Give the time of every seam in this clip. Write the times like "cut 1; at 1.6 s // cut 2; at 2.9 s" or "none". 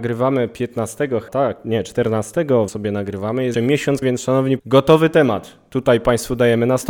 cut 1; at 1.3 s // cut 2; at 2.7 s // cut 3; at 3.5 s // cut 4; at 4.0 s // cut 5; at 4.6 s

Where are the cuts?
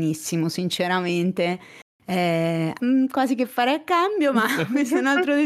cut 1; at 2.8 s

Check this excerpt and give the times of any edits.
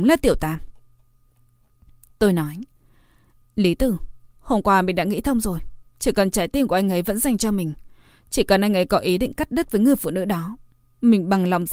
none

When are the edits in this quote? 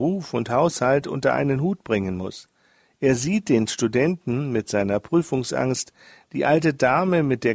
none

